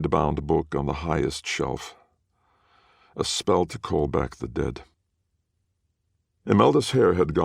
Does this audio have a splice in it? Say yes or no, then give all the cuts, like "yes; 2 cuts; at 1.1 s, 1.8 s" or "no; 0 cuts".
no; 0 cuts